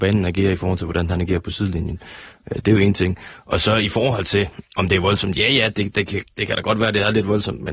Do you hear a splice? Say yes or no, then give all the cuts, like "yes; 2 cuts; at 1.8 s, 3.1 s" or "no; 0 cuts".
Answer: no; 0 cuts